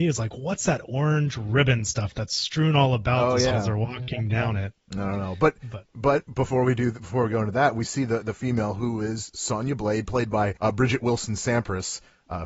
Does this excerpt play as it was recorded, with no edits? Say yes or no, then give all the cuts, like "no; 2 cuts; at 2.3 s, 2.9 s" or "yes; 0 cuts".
no; 3 cuts; at 3.5 s, 4.8 s, 10.6 s